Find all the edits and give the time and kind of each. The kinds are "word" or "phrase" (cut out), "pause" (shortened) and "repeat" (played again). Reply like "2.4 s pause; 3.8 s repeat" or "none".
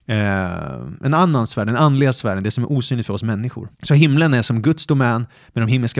3.7 s pause